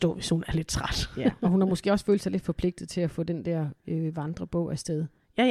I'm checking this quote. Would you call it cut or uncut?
uncut